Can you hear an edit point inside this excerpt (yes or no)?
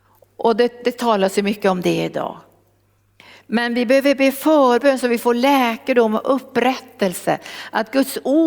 no